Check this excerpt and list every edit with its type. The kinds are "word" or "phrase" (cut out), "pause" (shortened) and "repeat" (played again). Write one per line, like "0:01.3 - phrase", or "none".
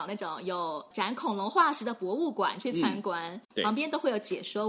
0:03.5 - pause